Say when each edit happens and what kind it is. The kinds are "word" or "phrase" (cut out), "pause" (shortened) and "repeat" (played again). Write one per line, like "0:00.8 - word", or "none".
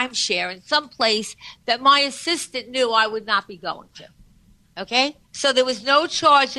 0:05.2 - pause